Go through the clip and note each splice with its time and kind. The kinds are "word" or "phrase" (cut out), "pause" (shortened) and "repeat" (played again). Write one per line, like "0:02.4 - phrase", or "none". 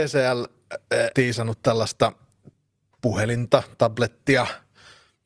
0:01.1 - word